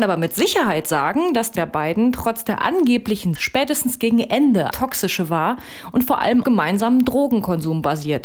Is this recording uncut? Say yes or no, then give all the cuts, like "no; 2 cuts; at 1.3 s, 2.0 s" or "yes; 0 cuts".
no; 4 cuts; at 1.5 s, 3.3 s, 4.7 s, 6.4 s